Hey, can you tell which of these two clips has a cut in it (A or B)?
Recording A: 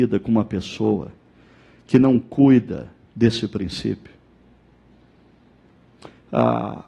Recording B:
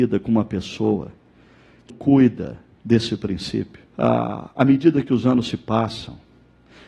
B